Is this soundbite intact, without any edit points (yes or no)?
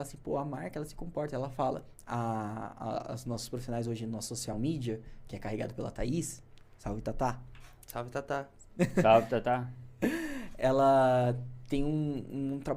yes